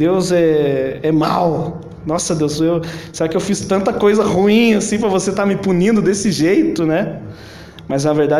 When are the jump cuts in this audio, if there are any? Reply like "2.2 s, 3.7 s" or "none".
none